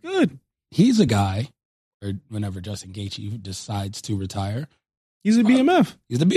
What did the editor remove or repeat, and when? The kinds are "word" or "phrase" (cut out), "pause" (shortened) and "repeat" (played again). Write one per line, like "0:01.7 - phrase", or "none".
none